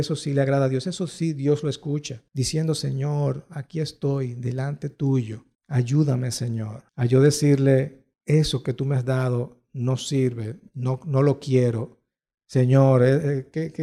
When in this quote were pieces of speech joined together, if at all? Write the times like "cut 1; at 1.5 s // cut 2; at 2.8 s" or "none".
cut 1; at 2.3 s // cut 2; at 5.5 s // cut 3; at 6.9 s // cut 4; at 8.1 s